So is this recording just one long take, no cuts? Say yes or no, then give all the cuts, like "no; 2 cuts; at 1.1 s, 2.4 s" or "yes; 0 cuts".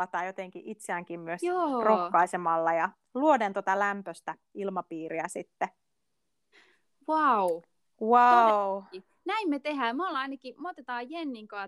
yes; 0 cuts